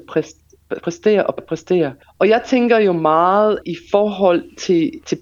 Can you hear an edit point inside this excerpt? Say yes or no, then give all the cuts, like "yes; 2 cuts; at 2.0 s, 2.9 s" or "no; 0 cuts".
yes; 3 cuts; at 1.4 s, 2.0 s, 3.6 s